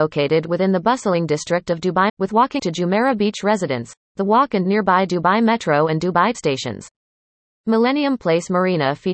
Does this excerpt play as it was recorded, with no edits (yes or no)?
no